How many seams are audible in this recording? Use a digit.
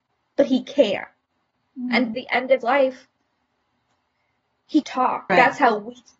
4